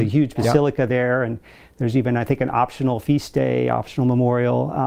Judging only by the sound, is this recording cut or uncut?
uncut